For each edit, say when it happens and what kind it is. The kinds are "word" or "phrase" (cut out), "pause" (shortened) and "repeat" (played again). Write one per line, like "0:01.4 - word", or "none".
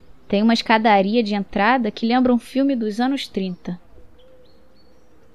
none